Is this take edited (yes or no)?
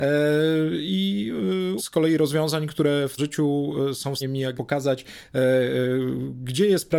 yes